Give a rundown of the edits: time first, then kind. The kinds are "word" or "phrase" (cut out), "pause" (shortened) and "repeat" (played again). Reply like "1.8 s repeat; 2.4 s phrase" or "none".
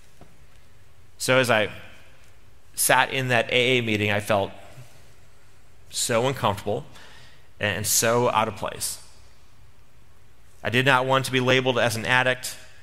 none